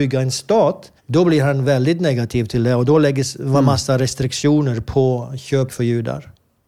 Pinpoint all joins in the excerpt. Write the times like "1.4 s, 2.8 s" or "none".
1.0 s, 5.7 s